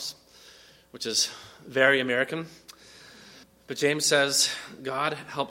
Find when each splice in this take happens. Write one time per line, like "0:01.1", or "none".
0:03.4